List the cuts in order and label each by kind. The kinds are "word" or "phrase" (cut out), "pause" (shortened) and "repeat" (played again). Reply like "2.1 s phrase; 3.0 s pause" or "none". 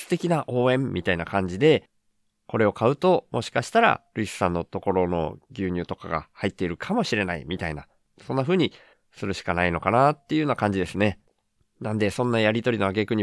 4.1 s pause